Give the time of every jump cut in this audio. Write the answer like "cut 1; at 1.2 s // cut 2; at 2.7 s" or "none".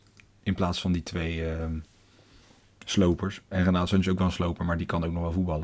none

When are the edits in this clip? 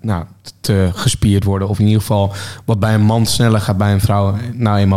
cut 1; at 3.6 s

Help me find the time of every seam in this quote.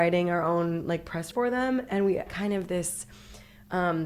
cut 1; at 1.3 s // cut 2; at 2.3 s

